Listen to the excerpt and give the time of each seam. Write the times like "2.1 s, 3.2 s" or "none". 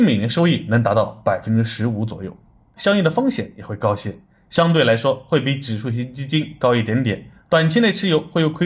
2.8 s